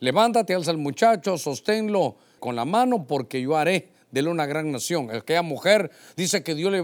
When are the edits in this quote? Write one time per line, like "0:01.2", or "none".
0:02.4

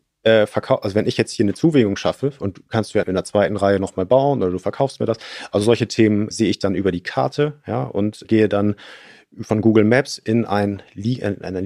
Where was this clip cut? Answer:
0:03.0
0:06.3
0:08.2

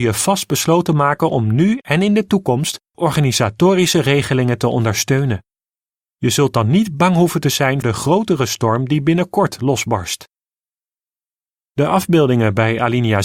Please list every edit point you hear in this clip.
0:07.8

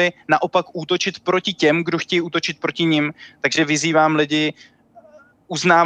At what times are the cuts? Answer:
none

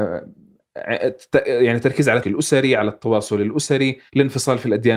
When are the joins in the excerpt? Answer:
0:02.2
0:04.1

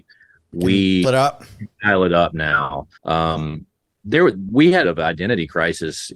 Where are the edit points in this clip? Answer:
0:01.0
0:03.0
0:04.8

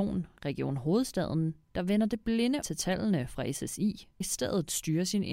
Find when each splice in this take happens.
0:01.6
0:02.6
0:04.2

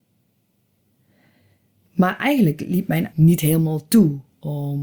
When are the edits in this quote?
0:03.1

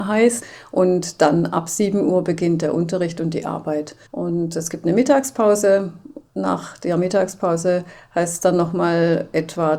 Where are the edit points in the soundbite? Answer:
0:04.1
0:06.3

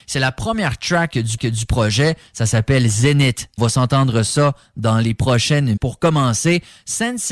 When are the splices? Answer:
0:01.4
0:03.6
0:05.8

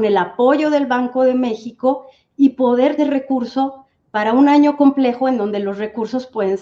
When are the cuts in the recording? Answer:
0:03.0

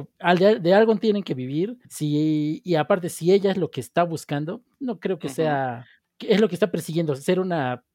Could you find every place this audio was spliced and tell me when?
0:01.8
0:06.0

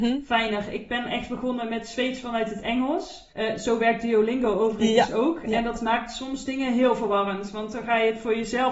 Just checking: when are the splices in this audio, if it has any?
0:03.3

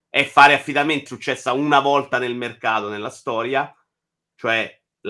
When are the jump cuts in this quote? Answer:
0:01.1

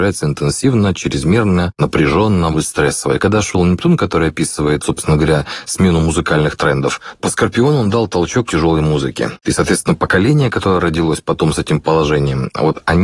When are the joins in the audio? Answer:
0:02.5
0:04.8
0:07.2
0:08.5

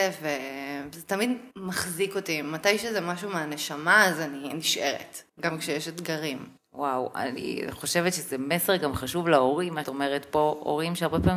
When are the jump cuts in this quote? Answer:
0:01.5
0:05.3
0:06.6
0:09.8

